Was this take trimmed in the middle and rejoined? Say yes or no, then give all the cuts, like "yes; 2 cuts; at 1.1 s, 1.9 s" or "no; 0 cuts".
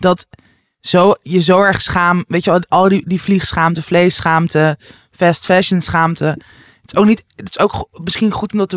no; 0 cuts